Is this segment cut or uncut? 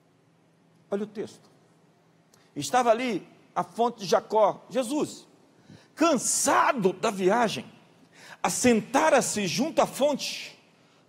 uncut